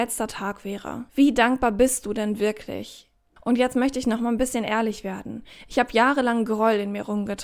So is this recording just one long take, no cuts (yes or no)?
no